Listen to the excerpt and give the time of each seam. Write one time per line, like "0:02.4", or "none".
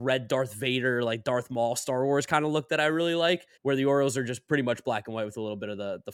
0:03.6